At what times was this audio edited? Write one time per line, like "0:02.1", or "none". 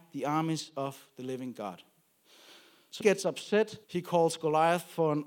0:03.0
0:03.8